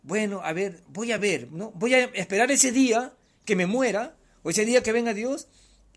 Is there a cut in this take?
no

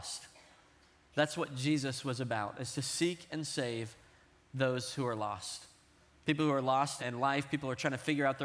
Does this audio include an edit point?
yes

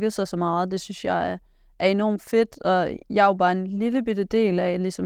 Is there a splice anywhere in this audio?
no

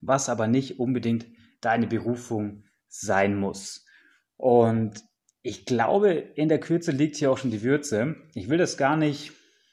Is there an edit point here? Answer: no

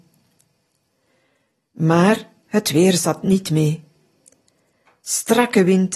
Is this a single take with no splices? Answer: yes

